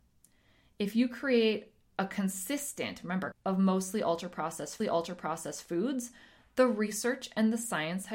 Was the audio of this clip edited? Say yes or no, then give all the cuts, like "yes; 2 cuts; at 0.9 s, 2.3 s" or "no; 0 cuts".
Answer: yes; 2 cuts; at 3.3 s, 4.8 s